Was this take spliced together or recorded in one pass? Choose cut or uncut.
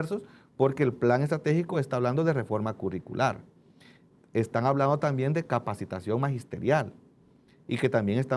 uncut